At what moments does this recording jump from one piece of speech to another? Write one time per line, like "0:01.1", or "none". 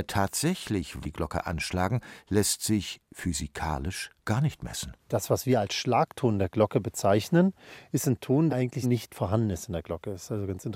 0:01.0
0:04.2
0:05.0
0:08.5
0:08.8